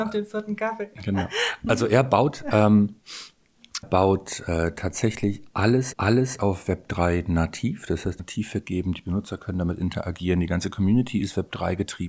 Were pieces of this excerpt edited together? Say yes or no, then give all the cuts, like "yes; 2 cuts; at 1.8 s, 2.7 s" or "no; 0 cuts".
yes; 3 cuts; at 3.8 s, 5.9 s, 8.2 s